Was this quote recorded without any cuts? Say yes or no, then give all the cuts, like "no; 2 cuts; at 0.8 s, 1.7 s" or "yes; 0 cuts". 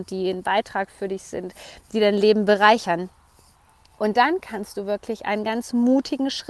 yes; 0 cuts